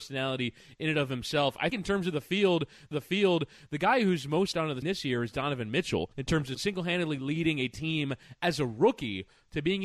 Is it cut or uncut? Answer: cut